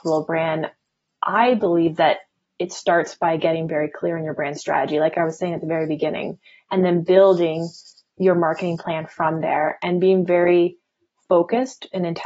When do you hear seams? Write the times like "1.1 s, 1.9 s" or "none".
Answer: none